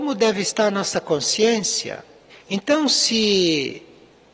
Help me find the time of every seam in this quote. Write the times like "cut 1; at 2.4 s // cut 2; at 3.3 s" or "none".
cut 1; at 2.3 s

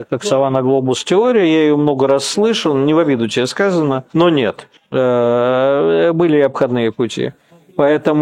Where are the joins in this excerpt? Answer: cut 1; at 4.1 s

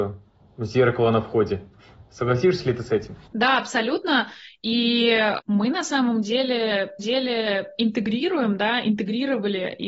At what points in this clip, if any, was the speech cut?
cut 1; at 3.3 s // cut 2; at 7.0 s

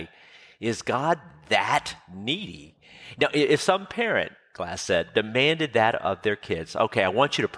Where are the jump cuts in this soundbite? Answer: none

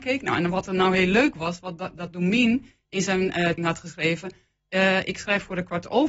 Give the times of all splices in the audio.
cut 1; at 3.6 s

